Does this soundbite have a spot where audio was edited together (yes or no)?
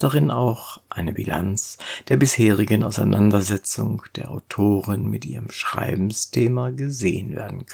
no